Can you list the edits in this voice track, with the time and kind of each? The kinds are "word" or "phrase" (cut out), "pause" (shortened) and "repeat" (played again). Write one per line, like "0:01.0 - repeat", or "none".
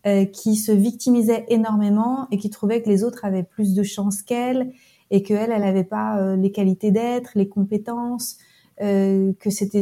none